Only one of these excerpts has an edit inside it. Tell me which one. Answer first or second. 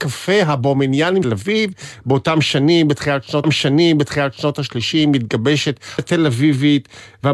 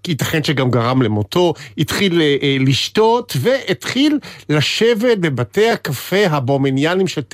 first